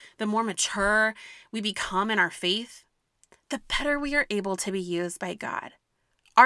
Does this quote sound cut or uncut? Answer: uncut